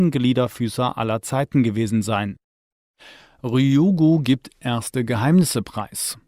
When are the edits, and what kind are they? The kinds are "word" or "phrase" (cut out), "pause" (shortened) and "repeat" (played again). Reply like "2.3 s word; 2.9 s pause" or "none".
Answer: none